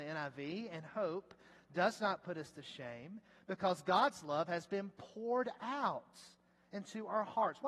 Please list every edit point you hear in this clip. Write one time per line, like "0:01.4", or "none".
none